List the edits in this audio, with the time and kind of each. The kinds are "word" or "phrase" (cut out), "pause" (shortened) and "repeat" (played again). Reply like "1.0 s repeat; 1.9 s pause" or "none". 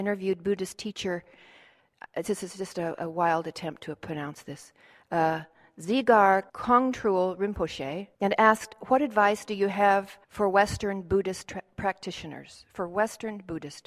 6.5 s pause; 8.1 s pause; 10.2 s pause